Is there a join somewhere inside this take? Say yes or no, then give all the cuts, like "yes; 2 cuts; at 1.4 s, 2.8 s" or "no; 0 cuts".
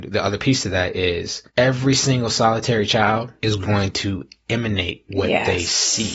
yes; 2 cuts; at 1.5 s, 3.4 s